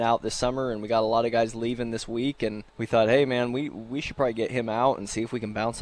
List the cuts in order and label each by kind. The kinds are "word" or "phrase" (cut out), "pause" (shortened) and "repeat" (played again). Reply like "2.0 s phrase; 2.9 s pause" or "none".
2.7 s pause